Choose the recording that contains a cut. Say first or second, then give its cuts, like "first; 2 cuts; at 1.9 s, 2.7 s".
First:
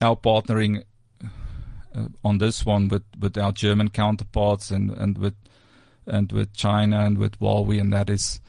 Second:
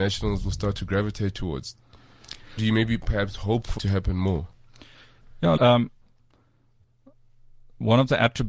second; 3 cuts; at 2.6 s, 3.8 s, 5.6 s